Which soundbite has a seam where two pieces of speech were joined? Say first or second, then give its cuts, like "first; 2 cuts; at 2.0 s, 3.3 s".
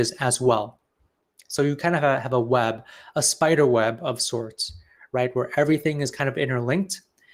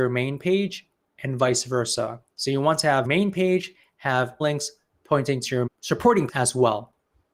second; 5 cuts; at 2.3 s, 3.0 s, 4.4 s, 5.7 s, 6.3 s